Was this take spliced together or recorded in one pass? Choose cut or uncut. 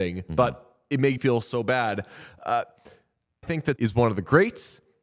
cut